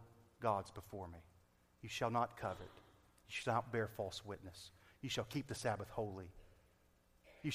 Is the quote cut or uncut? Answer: uncut